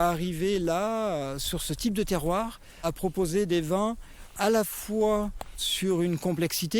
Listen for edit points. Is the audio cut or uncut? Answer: uncut